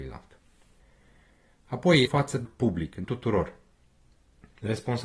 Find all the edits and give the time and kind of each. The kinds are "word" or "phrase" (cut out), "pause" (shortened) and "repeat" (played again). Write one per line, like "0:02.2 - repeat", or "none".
0:02.0 - phrase
0:02.4 - word
0:03.0 - word